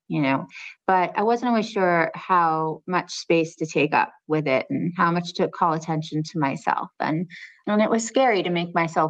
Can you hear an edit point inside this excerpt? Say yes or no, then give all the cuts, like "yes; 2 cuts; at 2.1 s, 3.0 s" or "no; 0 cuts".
no; 0 cuts